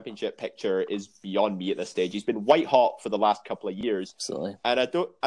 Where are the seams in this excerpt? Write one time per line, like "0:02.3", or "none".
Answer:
none